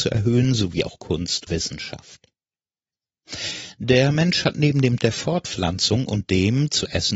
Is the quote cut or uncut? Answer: cut